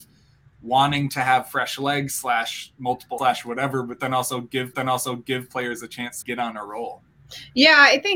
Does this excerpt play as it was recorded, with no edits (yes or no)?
no